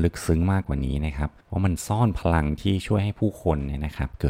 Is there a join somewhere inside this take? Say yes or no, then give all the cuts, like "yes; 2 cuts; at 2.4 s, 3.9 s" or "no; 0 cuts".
yes; 1 cut; at 1.4 s